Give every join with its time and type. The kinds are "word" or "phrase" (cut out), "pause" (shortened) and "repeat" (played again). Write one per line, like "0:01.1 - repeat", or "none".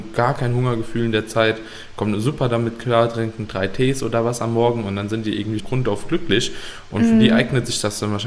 0:05.6 - word